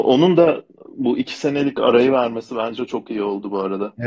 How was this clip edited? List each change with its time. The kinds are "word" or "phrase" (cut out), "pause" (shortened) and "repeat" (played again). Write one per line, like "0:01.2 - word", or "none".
none